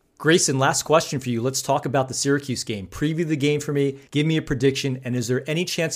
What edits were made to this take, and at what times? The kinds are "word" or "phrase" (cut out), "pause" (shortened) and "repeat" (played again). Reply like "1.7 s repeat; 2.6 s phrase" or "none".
4.1 s pause